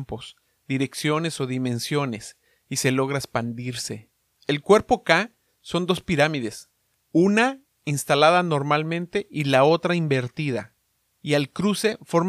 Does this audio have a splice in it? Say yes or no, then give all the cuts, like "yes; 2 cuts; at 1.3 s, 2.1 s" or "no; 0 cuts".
no; 0 cuts